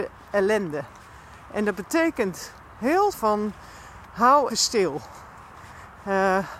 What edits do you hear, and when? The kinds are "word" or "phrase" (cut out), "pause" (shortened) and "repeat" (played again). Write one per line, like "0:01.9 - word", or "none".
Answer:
0:03.1 - word
0:04.5 - word